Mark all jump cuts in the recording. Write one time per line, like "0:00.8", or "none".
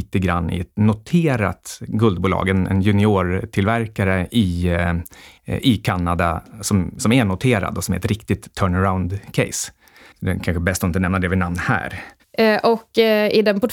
none

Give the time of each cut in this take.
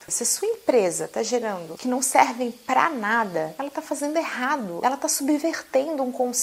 0:01.8

